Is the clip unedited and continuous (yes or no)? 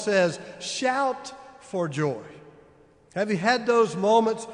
yes